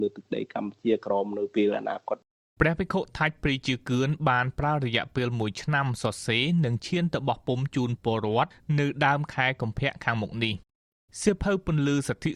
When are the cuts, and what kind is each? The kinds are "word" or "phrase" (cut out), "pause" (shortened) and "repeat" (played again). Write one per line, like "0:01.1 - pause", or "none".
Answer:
none